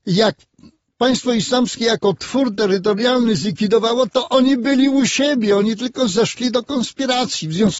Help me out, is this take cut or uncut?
uncut